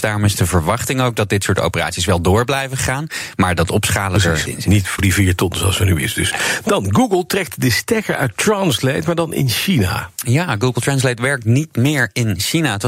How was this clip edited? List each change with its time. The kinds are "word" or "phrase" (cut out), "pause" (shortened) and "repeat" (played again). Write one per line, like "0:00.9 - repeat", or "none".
0:04.5 - word
0:05.0 - word